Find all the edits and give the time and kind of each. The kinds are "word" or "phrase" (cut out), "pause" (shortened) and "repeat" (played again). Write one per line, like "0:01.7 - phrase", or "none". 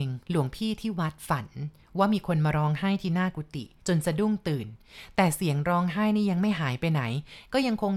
0:03.8 - pause